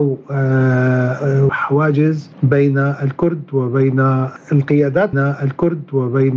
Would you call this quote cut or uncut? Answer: cut